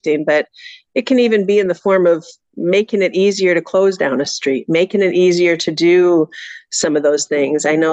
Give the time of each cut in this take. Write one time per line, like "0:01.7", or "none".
none